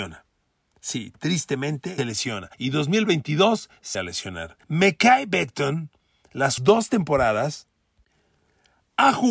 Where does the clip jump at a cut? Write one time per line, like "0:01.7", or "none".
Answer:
0:02.0
0:02.5
0:03.9
0:04.6
0:06.6